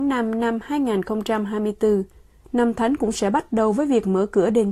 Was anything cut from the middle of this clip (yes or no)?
no